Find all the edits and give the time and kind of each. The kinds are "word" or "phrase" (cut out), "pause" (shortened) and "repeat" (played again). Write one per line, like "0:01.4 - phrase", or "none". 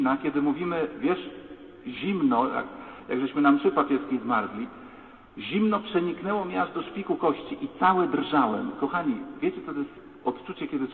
none